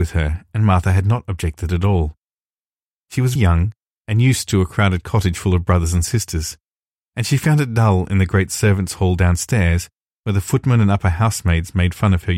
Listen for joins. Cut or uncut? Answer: cut